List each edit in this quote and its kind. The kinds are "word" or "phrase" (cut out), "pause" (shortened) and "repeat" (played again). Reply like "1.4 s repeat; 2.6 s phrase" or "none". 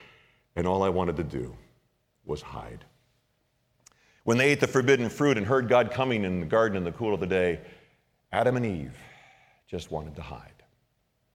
none